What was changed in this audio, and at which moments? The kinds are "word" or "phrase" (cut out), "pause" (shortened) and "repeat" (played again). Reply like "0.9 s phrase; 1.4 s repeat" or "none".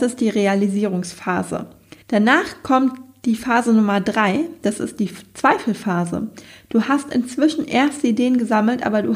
2.0 s pause